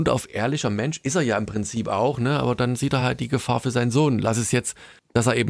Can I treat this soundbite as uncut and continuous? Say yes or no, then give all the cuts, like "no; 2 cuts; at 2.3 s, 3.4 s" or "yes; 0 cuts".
yes; 0 cuts